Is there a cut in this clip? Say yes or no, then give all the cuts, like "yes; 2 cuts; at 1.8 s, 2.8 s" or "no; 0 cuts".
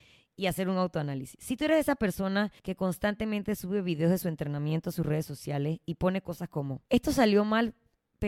yes; 2 cuts; at 2.6 s, 6.9 s